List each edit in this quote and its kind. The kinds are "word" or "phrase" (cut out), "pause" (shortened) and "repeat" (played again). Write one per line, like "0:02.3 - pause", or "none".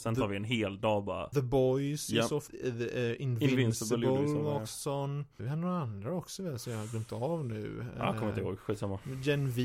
0:01.3 - word
0:02.5 - phrase
0:05.4 - word

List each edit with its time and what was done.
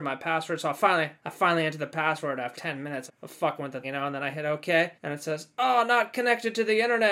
0:01.2 - pause
0:02.6 - word
0:03.1 - word
0:03.8 - word
0:04.3 - phrase
0:05.0 - pause

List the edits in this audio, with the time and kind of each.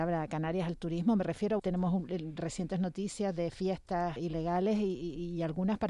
0:01.6 - word
0:04.2 - word

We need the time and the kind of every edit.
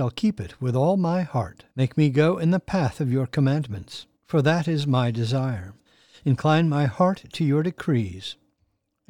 0:01.7 - pause
0:04.2 - pause
0:05.9 - pause

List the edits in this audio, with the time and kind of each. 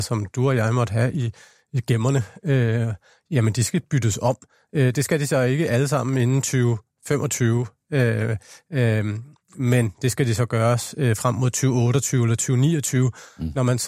none

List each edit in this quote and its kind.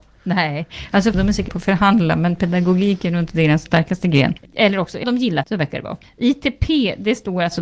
0:01.1 - word
0:01.5 - word
0:03.7 - word
0:05.0 - word
0:05.4 - word

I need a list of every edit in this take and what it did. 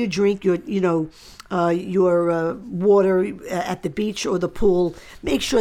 none

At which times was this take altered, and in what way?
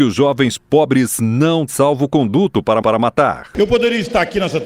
0:01.7 - word
0:02.8 - repeat

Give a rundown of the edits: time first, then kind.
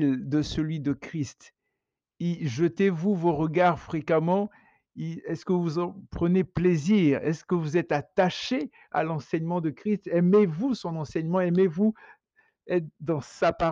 none

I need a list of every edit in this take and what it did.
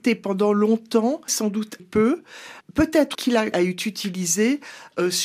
0:01.3 - word
0:01.8 - word
0:03.1 - word
0:03.5 - word

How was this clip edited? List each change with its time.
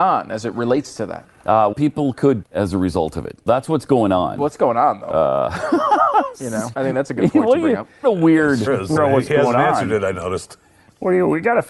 0:01.7 - word
0:02.4 - word
0:03.5 - word
0:06.7 - word
0:08.0 - phrase
0:08.7 - word
0:09.0 - phrase

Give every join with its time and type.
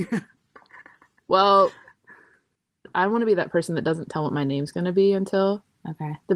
none

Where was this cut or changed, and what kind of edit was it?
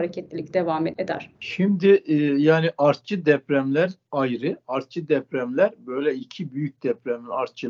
0:01.3 - pause

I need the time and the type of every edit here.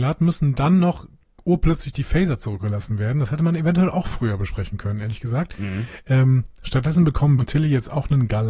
0:07.4 - word

